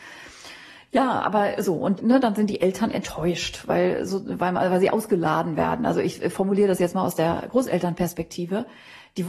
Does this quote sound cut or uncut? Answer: uncut